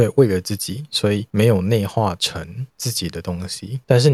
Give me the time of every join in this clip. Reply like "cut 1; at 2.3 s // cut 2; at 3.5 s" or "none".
cut 1; at 2.7 s